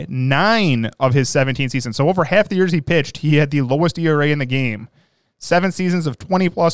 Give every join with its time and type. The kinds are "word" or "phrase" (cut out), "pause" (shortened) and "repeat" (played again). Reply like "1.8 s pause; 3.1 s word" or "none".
none